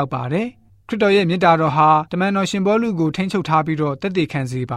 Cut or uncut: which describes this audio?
cut